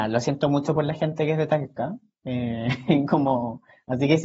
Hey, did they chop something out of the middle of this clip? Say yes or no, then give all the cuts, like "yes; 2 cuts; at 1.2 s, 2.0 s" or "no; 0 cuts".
no; 0 cuts